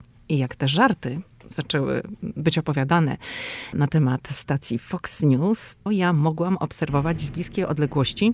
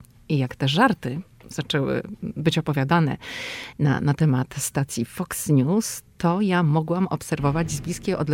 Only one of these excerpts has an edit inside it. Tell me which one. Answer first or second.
first